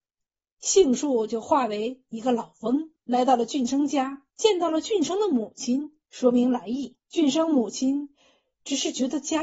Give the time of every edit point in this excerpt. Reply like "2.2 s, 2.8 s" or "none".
3.0 s, 4.3 s, 6.0 s, 7.1 s